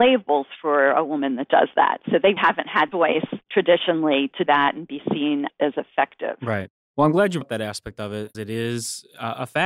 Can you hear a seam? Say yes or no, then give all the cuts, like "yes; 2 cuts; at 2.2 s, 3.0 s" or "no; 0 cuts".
yes; 6 cuts; at 2.4 s, 2.9 s, 4.5 s, 5.5 s, 7.4 s, 8.3 s